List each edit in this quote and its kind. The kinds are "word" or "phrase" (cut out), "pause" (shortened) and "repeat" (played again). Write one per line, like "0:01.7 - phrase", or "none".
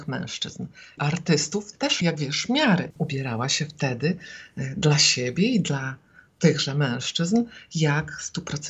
0:01.0 - phrase
0:02.0 - word